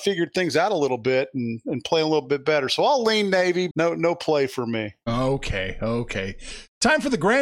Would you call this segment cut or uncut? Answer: cut